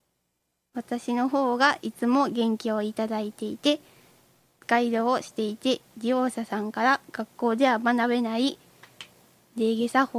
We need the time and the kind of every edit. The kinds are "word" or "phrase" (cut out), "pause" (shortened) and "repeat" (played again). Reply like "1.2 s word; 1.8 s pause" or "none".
none